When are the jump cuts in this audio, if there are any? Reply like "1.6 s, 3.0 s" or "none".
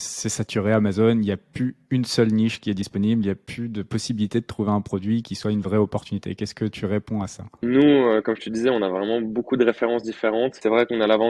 7.6 s

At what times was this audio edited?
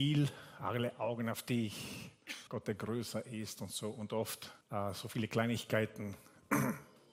2.5 s, 4.6 s

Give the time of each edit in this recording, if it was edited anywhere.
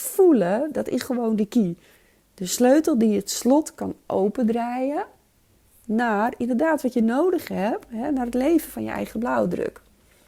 none

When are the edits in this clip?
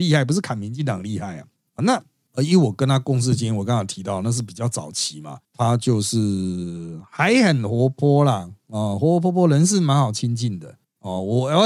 1.8 s, 5.4 s

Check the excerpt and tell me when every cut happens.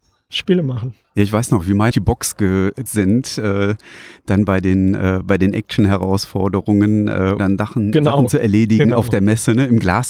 1.0 s, 1.9 s, 2.9 s, 7.4 s

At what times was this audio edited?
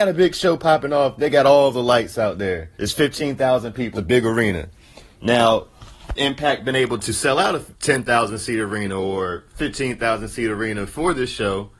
2.7 s, 3.9 s, 6.2 s, 7.7 s

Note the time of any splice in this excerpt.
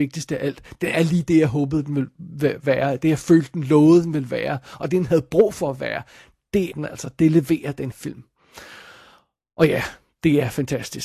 6.7 s, 7.9 s

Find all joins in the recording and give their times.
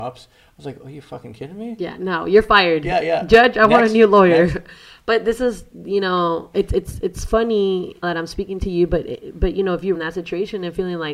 8.0 s, 9.9 s

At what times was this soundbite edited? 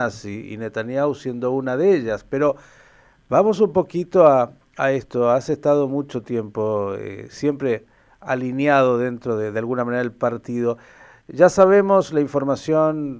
none

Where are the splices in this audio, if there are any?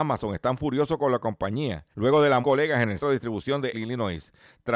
1.9 s, 2.4 s, 3.0 s, 3.7 s

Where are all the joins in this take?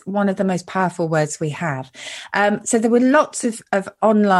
none

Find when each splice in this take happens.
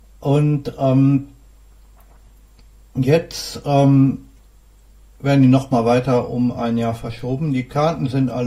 none

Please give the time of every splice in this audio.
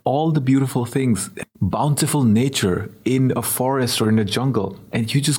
1.4 s

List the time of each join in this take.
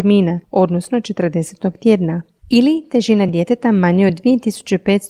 none

